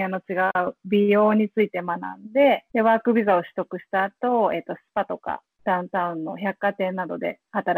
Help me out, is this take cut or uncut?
cut